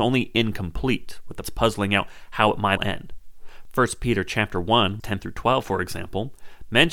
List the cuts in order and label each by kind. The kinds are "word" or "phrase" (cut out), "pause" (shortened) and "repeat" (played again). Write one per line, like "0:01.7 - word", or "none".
0:01.4 - word
0:02.8 - word
0:05.0 - word